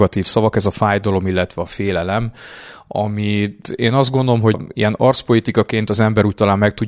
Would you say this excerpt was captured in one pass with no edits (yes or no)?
no